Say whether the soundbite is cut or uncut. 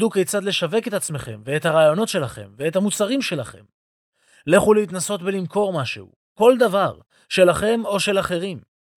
uncut